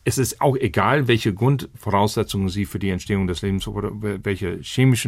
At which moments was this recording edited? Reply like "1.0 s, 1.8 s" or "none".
none